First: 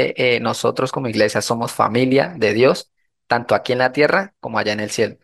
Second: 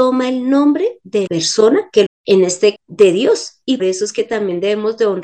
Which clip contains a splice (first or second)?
second